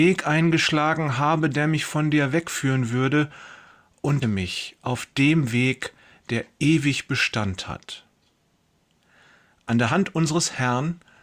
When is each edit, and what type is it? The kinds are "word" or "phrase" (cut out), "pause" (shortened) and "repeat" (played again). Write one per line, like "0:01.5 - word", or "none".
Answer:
0:04.2 - word